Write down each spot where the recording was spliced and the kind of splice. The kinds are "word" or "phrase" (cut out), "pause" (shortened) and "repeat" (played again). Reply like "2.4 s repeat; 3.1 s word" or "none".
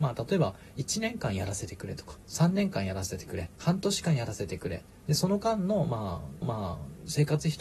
2.2 s pause; 3.6 s pause; 6.4 s repeat

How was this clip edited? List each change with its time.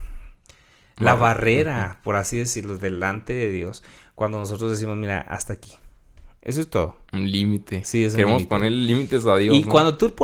none

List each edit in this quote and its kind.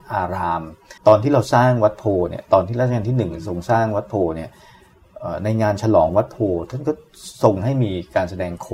1.0 s pause

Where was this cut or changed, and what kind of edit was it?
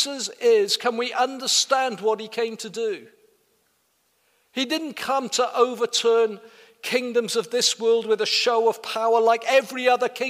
none

